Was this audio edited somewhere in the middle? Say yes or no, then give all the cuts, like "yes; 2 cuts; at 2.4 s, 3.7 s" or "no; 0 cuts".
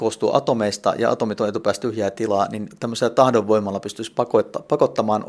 no; 0 cuts